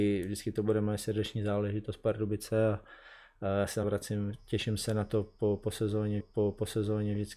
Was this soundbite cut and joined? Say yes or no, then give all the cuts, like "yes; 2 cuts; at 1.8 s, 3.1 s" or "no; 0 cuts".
yes; 2 cuts; at 3.8 s, 6.2 s